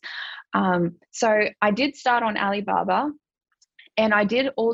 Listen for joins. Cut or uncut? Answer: uncut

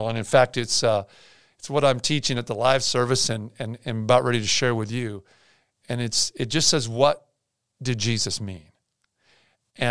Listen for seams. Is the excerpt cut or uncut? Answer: uncut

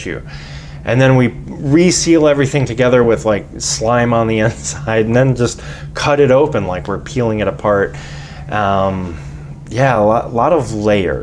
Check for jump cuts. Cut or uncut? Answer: uncut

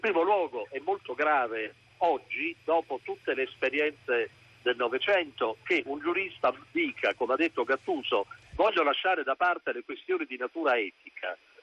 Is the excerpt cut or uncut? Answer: uncut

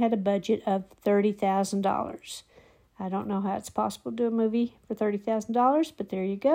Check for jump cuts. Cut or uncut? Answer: uncut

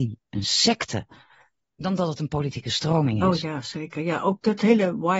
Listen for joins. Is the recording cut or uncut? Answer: uncut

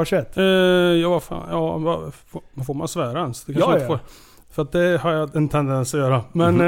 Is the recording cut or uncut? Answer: uncut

